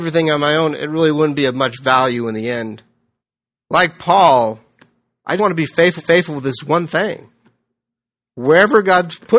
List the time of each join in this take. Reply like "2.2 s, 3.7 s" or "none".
3.2 s, 5.4 s, 6.0 s